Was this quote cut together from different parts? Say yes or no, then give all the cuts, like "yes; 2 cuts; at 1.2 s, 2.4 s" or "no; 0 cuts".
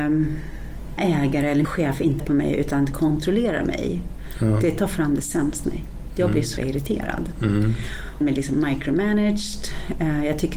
yes; 6 cuts; at 1.0 s, 1.6 s, 2.2 s, 5.6 s, 6.6 s, 8.2 s